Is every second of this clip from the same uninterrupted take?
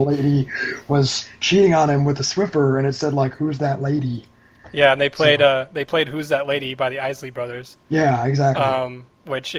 yes; 0 cuts

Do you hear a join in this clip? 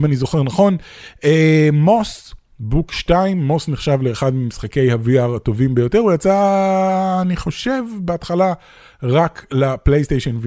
no; 0 cuts

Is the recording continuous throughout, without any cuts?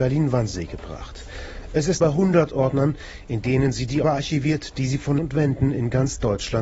no; 3 cuts; at 2.0 s, 4.0 s, 5.2 s

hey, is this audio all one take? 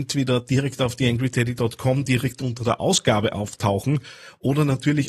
yes; 0 cuts

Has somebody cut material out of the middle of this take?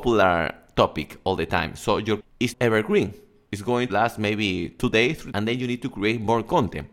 yes; 4 cuts; at 2.2 s, 2.5 s, 3.9 s, 5.3 s

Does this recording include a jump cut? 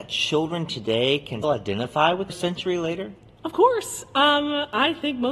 yes; 2 cuts; at 1.4 s, 2.3 s

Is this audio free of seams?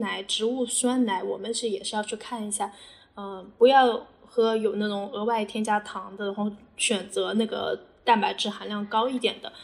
yes; 0 cuts

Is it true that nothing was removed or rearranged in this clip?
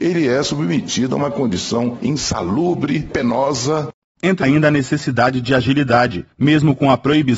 no; 2 cuts; at 4.4 s, 6.3 s

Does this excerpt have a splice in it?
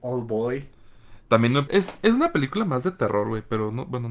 yes; 1 cut; at 1.7 s

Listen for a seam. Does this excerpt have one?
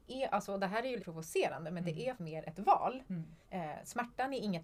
yes; 3 cuts; at 1.0 s, 2.2 s, 3.4 s

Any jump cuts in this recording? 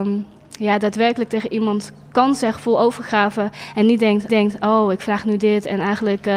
yes; 1 cut; at 4.3 s

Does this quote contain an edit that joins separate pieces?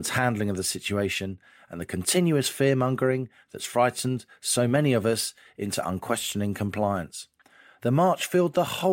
no; 0 cuts

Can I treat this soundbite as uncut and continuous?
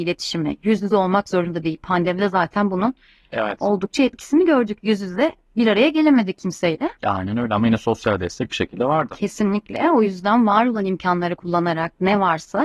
yes; 0 cuts

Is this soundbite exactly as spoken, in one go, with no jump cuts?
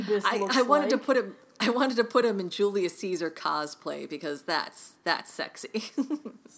yes; 0 cuts

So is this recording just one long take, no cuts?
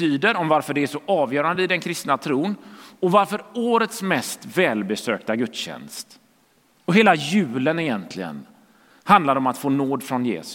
yes; 0 cuts

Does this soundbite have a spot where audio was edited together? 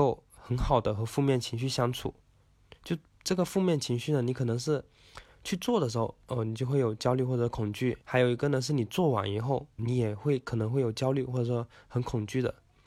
yes; 3 cuts; at 2.8 s, 8.0 s, 9.8 s

